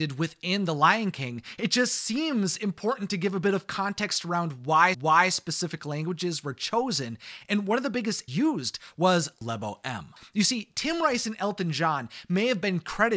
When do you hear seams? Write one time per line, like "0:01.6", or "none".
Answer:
0:04.9
0:08.3